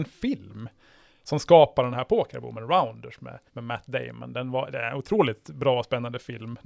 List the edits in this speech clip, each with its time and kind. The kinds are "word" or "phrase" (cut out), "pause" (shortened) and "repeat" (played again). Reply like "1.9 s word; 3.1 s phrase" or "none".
3.5 s pause